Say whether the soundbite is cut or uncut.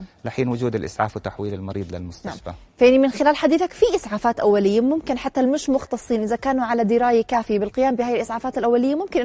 uncut